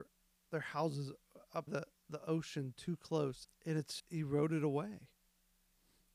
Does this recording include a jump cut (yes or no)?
yes